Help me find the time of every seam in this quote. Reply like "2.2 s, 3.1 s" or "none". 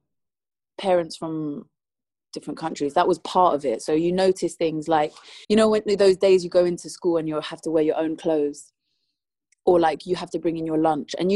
5.4 s